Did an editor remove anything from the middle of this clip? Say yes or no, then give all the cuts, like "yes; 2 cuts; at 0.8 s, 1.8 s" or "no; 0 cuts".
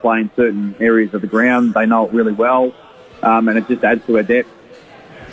no; 0 cuts